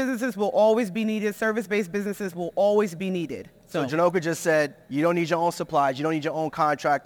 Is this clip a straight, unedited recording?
no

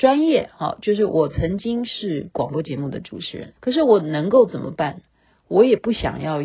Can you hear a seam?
yes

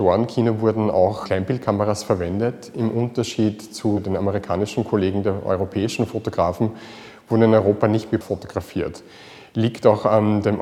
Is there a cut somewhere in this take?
yes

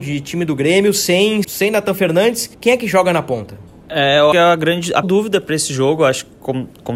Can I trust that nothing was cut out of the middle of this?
no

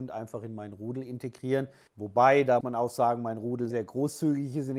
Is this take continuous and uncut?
no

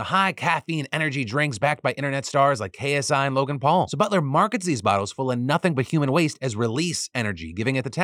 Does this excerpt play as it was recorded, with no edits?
yes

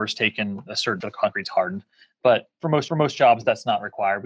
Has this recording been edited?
yes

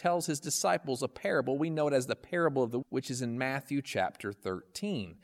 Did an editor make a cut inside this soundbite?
yes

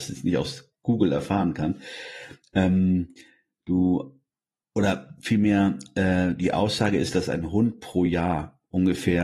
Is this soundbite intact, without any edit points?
yes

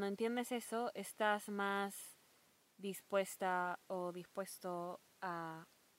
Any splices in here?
no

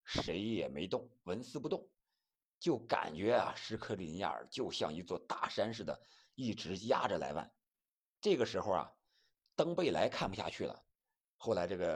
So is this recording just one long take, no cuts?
yes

